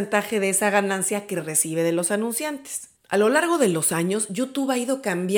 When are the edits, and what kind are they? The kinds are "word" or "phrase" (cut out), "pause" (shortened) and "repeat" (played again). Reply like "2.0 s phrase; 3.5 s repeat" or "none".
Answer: 3.0 s pause